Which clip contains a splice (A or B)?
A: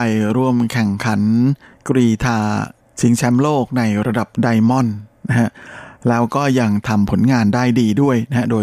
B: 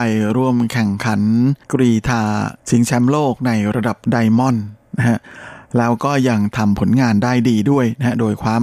B